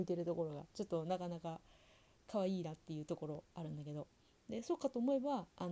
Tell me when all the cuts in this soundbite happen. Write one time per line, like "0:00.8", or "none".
none